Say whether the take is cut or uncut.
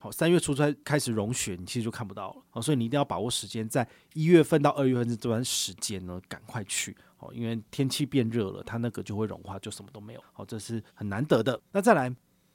cut